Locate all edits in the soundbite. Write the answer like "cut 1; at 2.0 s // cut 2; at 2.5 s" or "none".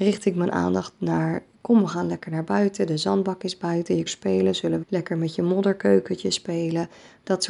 cut 1; at 4.1 s // cut 2; at 4.8 s

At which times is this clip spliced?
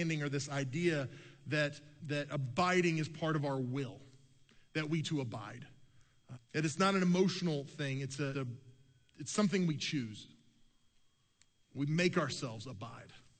cut 1; at 2.0 s // cut 2; at 5.0 s // cut 3; at 6.3 s // cut 4; at 8.3 s

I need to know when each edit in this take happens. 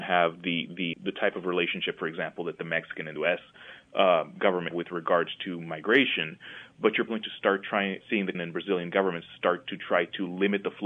cut 1; at 0.9 s // cut 2; at 3.2 s // cut 3; at 4.7 s // cut 4; at 7.1 s // cut 5; at 8.0 s // cut 6; at 8.3 s

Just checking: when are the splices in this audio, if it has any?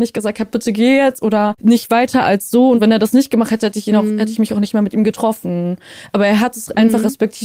none

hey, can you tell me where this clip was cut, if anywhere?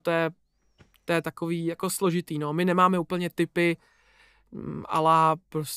none

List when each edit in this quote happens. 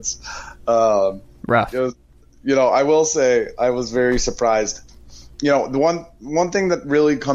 cut 1; at 5.3 s

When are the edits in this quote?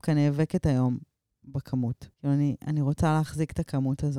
cut 1; at 2.1 s

